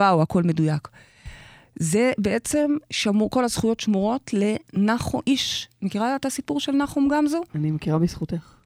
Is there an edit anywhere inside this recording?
no; 0 cuts

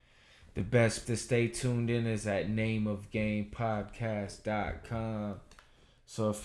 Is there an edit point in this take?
yes; 1 cut; at 1.0 s

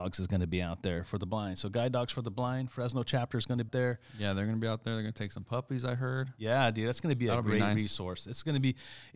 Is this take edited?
yes; 1 cut; at 3.7 s

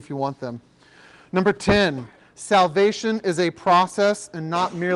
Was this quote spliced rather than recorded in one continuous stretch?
no; 0 cuts

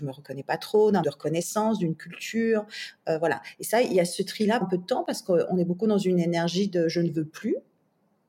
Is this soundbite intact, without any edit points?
no; 2 cuts; at 1.0 s, 4.6 s

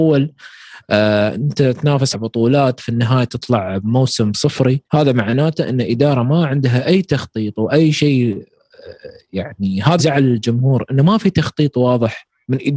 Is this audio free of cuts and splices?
no; 3 cuts; at 2.1 s, 4.9 s, 10.0 s

